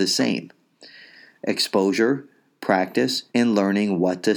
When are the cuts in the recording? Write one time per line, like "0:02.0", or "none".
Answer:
0:03.3